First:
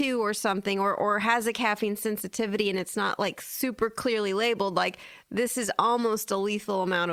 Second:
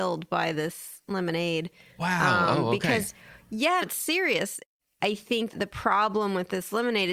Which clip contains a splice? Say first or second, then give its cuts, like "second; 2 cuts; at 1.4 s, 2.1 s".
second; 2 cuts; at 3.8 s, 5.5 s